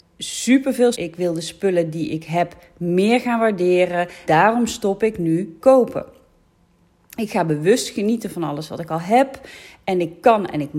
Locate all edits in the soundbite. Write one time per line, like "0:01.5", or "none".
0:00.9
0:04.3
0:05.6